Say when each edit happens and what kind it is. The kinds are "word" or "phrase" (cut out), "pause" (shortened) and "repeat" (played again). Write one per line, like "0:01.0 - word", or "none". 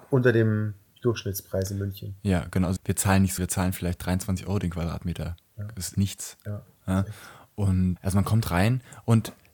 0:02.8 - word
0:03.4 - word
0:05.9 - word
0:08.0 - word